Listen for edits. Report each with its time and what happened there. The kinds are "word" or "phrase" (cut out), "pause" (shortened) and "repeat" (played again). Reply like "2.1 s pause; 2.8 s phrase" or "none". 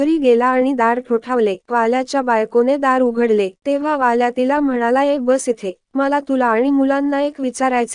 1.6 s pause; 3.6 s pause; 5.8 s pause